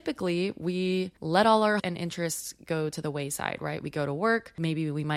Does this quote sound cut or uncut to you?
cut